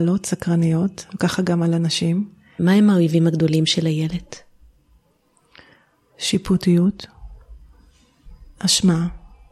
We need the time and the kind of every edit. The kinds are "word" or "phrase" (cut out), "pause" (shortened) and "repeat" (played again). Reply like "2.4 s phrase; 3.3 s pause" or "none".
none